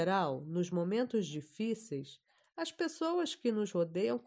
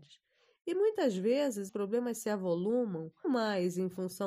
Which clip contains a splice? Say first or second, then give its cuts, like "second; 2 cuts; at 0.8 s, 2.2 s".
second; 2 cuts; at 1.7 s, 3.2 s